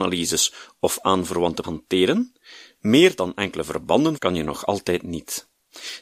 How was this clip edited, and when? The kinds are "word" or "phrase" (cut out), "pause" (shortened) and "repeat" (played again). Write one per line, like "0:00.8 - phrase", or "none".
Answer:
0:01.6 - word
0:04.2 - word